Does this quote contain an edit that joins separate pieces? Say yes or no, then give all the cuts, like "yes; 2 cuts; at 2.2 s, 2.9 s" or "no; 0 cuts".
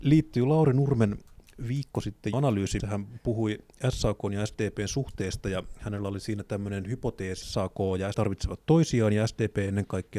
yes; 4 cuts; at 2.3 s, 2.8 s, 7.4 s, 8.1 s